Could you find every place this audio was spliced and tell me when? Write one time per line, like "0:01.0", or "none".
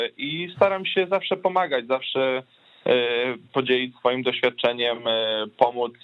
none